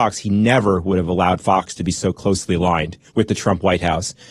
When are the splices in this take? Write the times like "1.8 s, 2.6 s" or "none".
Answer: 3.1 s